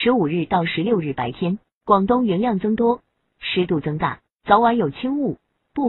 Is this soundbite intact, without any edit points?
yes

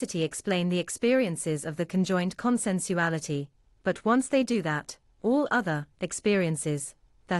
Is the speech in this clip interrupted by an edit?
yes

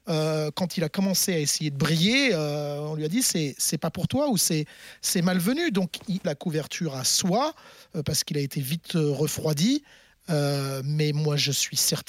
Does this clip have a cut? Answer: yes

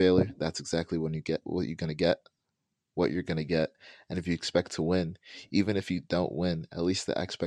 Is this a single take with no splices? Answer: yes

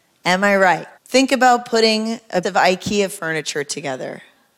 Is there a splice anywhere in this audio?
yes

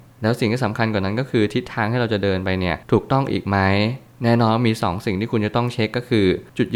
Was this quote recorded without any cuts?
no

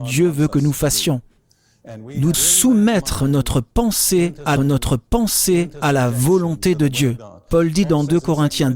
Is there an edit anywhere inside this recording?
yes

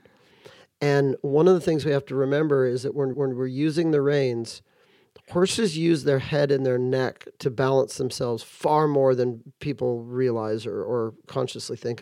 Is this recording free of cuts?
no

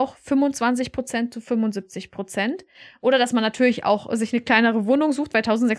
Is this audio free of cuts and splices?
yes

